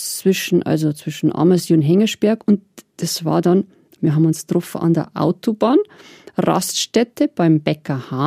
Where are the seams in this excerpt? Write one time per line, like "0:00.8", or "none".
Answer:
0:04.0